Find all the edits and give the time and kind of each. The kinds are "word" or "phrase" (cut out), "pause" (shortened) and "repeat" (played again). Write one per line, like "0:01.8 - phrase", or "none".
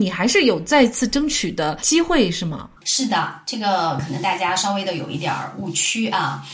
0:02.8 - pause